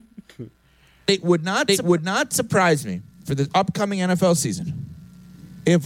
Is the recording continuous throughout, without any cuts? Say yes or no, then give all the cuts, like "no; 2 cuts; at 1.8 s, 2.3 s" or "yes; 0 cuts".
yes; 0 cuts